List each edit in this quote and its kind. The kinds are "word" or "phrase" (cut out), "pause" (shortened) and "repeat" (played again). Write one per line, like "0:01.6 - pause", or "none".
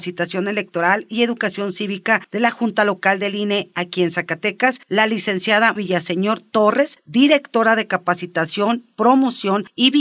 0:05.8 - word